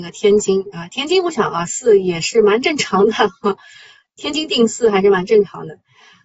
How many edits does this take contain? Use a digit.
0